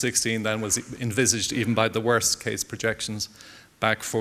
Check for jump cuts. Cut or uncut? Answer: uncut